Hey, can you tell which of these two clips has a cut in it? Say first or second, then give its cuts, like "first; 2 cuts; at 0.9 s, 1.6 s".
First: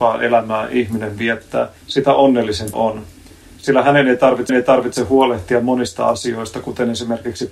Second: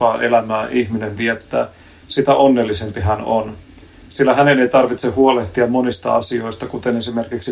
first; 3 cuts; at 1.8 s, 2.7 s, 4.5 s